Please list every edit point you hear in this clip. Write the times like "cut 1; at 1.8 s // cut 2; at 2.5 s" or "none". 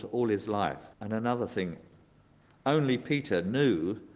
cut 1; at 0.9 s